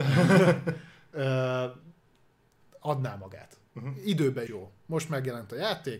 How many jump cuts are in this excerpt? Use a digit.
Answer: 1